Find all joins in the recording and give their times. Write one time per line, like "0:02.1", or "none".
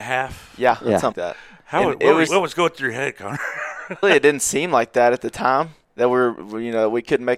0:01.1
0:02.3
0:04.0
0:05.8

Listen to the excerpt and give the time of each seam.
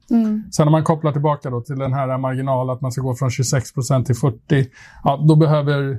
none

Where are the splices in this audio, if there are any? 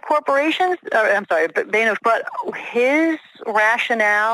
0:02.0
0:02.5

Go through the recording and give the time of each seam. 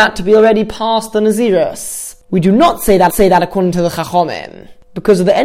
0:03.1

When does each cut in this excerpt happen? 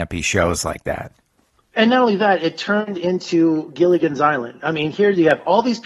none

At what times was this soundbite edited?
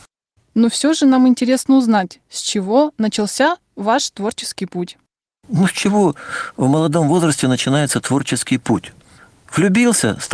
none

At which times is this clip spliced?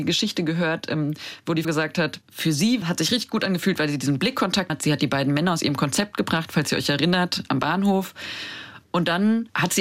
0:01.6
0:02.8
0:04.7

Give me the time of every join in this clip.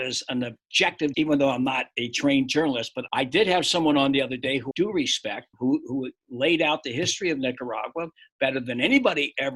0:01.1
0:03.1
0:04.7
0:05.5

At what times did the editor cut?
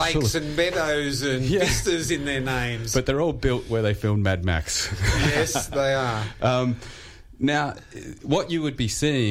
none

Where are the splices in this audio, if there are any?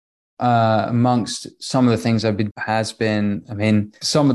0:02.5

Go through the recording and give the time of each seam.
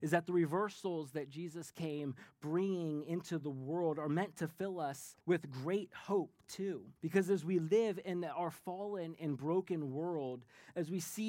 0:05.2
0:07.0

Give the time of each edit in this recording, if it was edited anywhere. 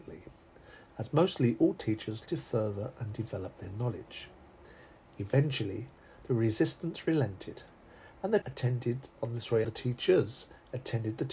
0:02.3
0:08.4
0:09.6

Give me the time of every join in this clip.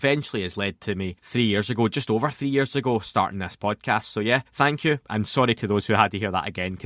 0:01.2
0:04.5

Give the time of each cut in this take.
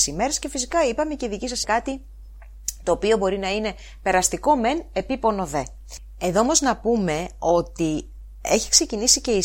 0:01.6

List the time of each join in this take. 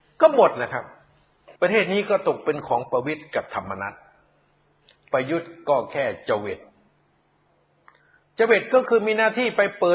0:01.6

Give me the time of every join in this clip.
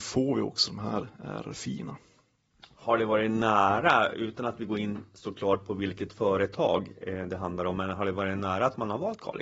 0:02.5

